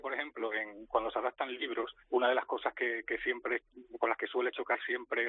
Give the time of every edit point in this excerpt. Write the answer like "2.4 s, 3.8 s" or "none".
2.0 s